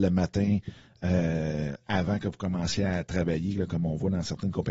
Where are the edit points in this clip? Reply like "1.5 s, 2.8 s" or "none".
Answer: none